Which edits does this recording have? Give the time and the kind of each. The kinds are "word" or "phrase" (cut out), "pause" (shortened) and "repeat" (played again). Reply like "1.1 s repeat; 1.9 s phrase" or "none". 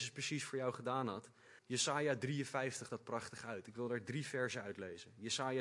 1.6 s pause; 2.9 s word